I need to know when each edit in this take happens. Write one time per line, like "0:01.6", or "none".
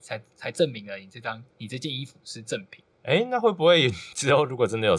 0:01.5
0:02.9